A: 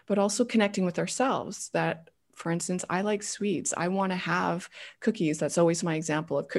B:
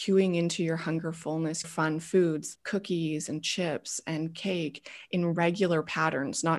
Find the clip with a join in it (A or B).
B